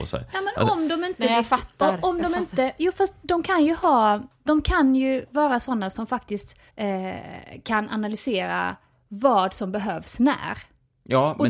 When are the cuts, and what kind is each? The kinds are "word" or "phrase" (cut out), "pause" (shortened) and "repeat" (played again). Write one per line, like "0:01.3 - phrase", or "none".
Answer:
0:06.7 - pause